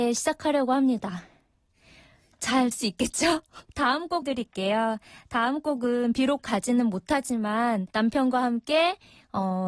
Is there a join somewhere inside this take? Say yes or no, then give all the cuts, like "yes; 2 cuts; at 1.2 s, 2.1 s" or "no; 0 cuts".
yes; 5 cuts; at 2.7 s, 3.7 s, 4.2 s, 6.4 s, 7.9 s